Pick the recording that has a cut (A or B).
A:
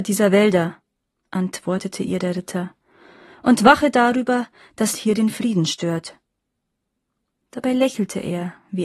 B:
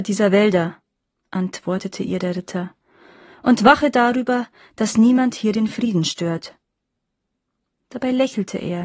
A